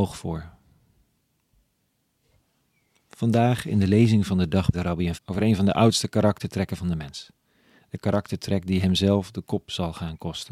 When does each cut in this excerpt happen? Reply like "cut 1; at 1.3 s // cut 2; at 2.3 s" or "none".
cut 1; at 4.7 s // cut 2; at 5.1 s

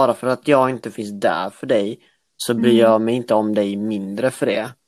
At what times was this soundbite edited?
none

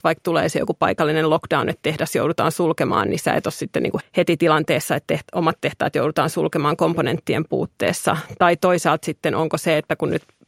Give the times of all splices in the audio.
cut 1; at 4.0 s

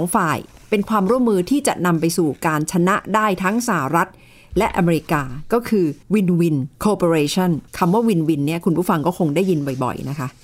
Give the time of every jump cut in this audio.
cut 1; at 6.0 s // cut 2; at 6.7 s // cut 3; at 7.7 s

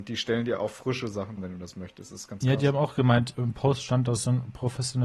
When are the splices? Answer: cut 1; at 1.4 s // cut 2; at 3.3 s

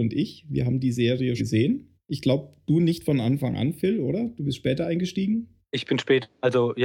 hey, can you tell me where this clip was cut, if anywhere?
cut 1; at 1.4 s

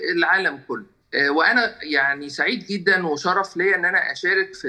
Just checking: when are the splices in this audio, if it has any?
cut 1; at 1.0 s

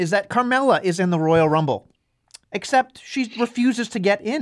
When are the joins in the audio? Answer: cut 1; at 2.4 s

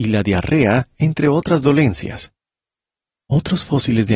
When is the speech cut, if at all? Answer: none

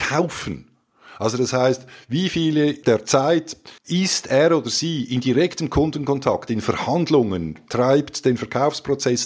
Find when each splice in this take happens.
cut 1; at 3.8 s

